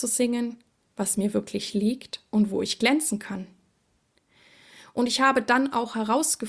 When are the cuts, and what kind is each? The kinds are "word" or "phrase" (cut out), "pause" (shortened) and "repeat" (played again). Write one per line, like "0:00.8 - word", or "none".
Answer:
none